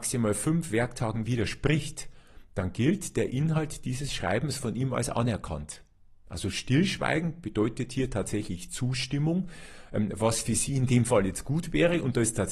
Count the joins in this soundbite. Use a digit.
0